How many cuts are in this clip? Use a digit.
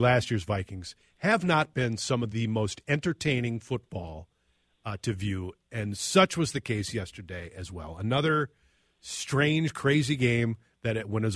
0